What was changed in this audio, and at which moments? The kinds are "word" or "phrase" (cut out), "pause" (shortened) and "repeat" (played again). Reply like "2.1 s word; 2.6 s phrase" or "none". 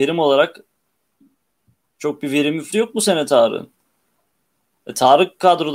2.7 s word